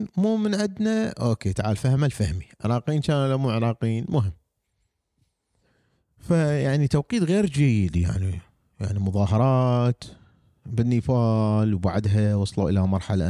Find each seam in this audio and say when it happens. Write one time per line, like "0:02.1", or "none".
none